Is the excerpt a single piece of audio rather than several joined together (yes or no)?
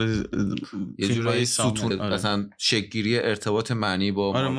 no